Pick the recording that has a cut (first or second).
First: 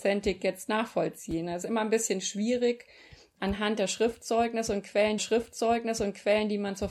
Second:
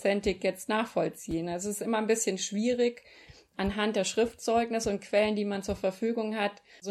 first